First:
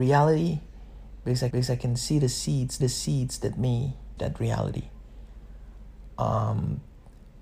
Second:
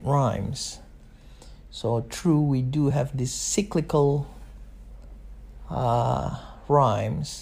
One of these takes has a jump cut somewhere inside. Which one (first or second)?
first